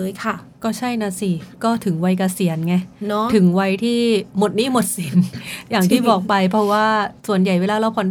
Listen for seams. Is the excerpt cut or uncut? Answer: cut